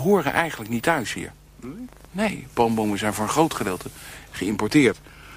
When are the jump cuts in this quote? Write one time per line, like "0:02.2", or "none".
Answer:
none